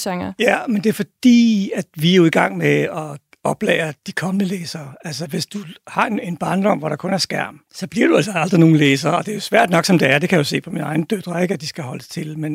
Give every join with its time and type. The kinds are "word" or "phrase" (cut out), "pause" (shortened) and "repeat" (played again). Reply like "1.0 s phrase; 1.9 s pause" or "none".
none